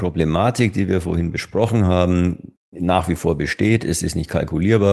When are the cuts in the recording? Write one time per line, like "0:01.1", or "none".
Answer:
0:02.6

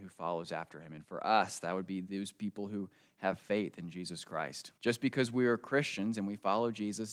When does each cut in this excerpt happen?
0:04.8

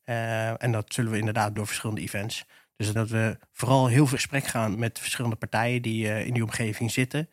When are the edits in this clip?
0:01.6
0:03.0
0:04.2
0:04.7

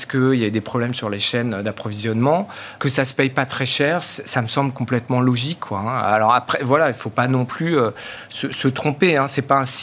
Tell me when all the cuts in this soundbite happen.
0:02.8

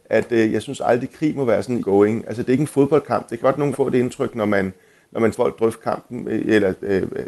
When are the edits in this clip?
0:01.8
0:03.4
0:03.7
0:05.3

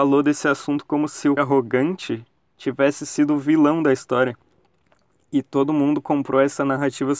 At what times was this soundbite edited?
0:01.4

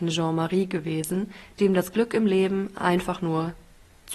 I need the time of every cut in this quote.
none

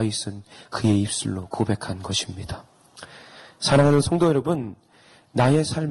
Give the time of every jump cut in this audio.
none

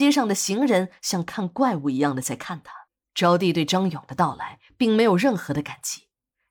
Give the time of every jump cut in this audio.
0:02.9

